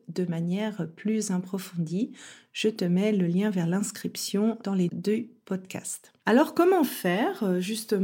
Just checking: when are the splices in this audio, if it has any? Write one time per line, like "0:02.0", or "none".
0:04.9
0:06.2